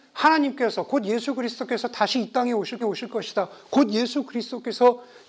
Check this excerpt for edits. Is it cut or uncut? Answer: cut